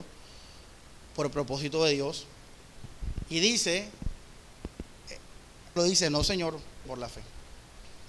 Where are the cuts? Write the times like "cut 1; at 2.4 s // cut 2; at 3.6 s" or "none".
cut 1; at 5.8 s // cut 2; at 6.9 s